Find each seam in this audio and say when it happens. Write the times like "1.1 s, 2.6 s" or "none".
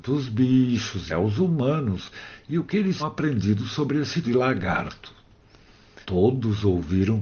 1.1 s, 3.0 s, 4.2 s, 6.0 s

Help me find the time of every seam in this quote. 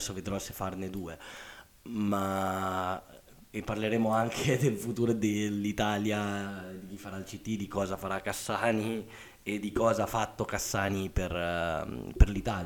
none

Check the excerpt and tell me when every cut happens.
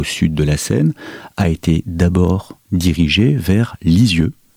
none

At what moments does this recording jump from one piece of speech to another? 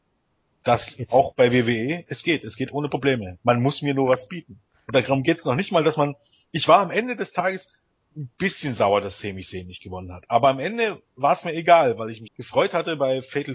12.3 s

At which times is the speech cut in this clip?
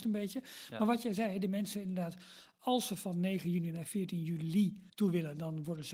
4.9 s

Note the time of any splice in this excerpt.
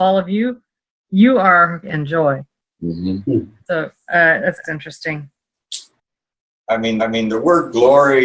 1.8 s, 3.6 s, 4.6 s, 7.0 s

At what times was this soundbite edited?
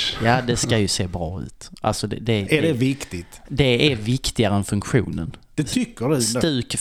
5.4 s

